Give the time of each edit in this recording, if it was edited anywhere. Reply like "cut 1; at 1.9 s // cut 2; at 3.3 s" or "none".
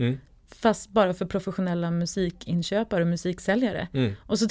none